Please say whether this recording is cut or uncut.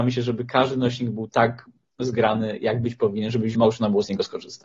cut